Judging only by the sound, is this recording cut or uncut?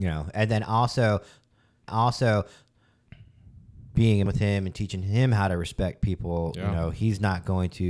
cut